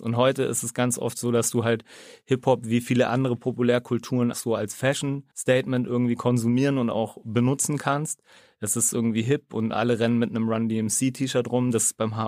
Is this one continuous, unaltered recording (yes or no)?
no